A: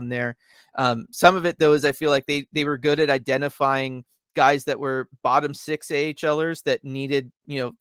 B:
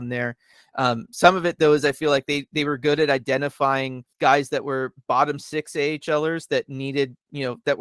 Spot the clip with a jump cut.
B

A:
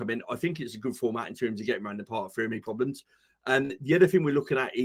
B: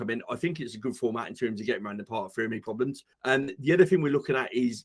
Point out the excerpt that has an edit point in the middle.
B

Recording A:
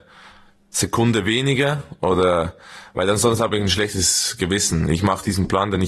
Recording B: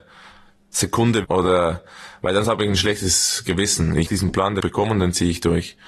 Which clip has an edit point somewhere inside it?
B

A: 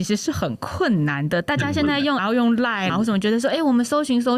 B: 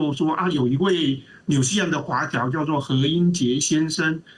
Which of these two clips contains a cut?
A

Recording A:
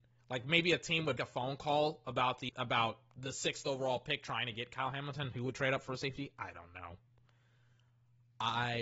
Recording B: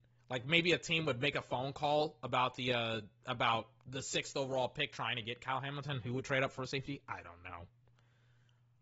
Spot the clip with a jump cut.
A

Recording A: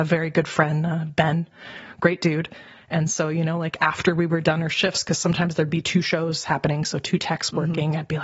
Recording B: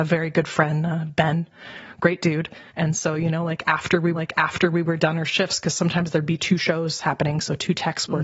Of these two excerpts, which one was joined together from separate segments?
B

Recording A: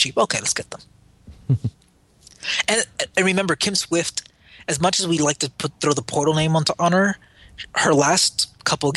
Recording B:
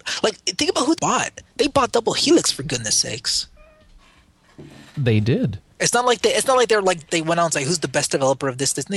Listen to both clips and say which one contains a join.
B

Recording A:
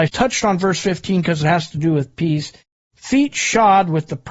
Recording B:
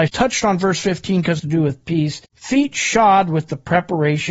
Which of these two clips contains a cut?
B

